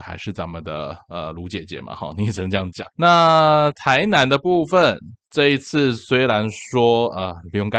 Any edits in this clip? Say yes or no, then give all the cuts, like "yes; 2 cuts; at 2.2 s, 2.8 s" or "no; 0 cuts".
yes; 1 cut; at 2.9 s